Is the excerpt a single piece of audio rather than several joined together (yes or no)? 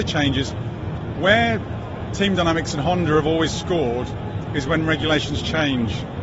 yes